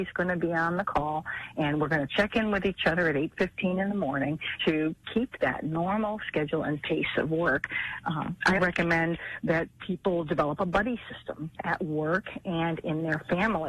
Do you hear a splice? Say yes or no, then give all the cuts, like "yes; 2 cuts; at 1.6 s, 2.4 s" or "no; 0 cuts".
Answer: yes; 3 cuts; at 4.6 s, 8.6 s, 11.5 s